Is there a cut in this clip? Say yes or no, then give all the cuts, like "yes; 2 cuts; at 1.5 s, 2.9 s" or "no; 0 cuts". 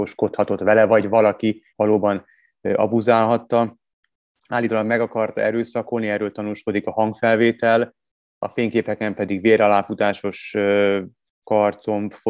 yes; 1 cut; at 1.7 s